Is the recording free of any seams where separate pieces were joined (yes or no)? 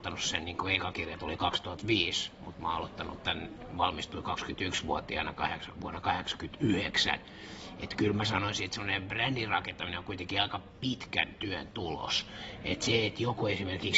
yes